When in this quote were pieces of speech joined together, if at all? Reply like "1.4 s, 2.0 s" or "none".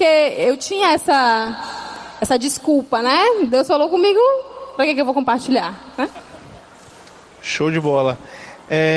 none